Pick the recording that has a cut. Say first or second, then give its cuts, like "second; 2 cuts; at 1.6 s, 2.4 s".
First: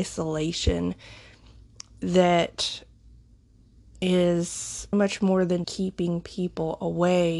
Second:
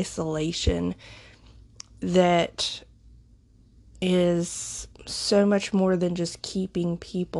first; 2 cuts; at 4.9 s, 5.6 s